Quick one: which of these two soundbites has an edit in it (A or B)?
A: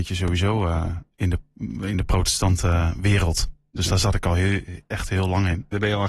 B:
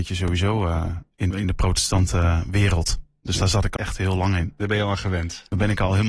B